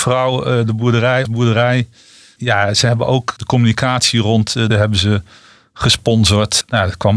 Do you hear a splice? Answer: yes; 2 cuts; at 1.3 s, 4.7 s

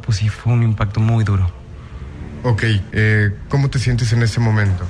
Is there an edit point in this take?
yes; 1 cut; at 2.9 s

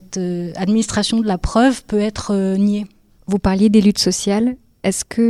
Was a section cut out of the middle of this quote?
no; 0 cuts

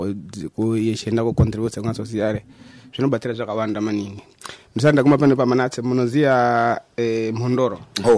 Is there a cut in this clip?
no; 0 cuts

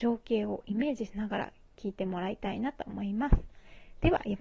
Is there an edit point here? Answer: no; 0 cuts

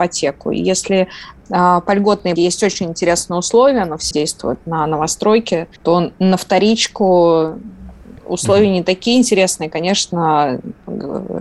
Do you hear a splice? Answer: yes; 3 cuts; at 2.4 s, 4.1 s, 5.8 s

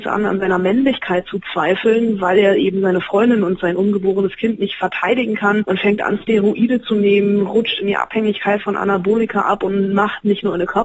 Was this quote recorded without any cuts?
yes; 0 cuts

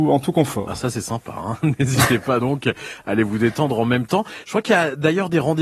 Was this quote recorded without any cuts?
yes; 0 cuts

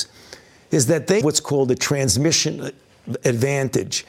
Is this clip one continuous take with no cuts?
no; 1 cut; at 1.2 s

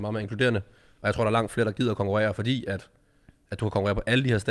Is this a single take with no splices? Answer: yes; 0 cuts

